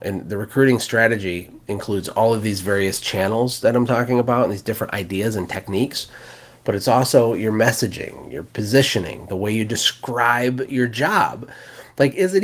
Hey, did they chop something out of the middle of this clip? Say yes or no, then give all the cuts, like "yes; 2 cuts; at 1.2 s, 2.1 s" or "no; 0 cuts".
no; 0 cuts